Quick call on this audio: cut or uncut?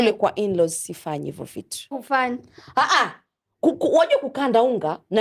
cut